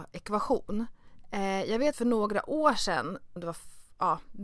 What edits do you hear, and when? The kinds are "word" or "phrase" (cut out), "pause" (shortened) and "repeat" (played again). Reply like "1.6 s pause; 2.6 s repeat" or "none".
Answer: 1.9 s word; 3.4 s word